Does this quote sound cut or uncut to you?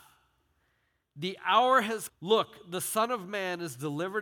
cut